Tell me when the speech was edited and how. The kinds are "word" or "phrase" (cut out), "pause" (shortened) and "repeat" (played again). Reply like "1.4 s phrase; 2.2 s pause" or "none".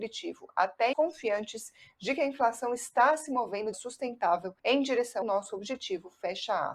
0.9 s word; 3.7 s phrase; 4.6 s pause; 5.2 s word